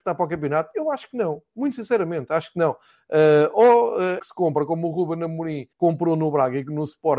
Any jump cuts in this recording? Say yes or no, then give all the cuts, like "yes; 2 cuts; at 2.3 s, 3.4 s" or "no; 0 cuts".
yes; 2 cuts; at 4.2 s, 5.7 s